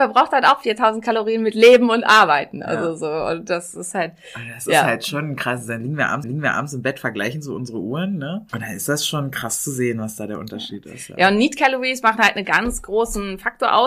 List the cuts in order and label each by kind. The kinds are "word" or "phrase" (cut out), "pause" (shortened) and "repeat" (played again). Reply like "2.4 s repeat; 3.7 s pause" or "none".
6.2 s repeat; 8.5 s pause